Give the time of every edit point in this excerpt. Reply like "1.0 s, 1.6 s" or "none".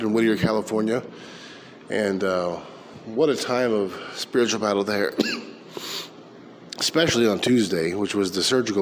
none

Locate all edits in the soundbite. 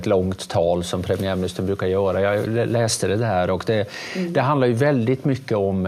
2.5 s

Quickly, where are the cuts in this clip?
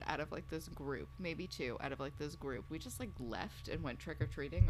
none

